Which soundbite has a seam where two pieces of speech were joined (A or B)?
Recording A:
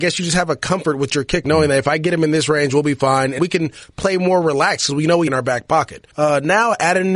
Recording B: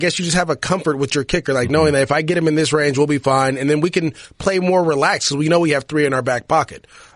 A